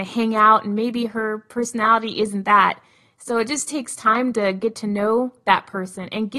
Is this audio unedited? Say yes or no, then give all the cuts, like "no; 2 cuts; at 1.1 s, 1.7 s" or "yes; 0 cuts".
yes; 0 cuts